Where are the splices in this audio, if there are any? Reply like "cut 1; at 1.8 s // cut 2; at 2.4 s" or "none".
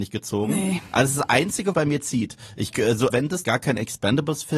cut 1; at 1.7 s // cut 2; at 3.1 s // cut 3; at 3.4 s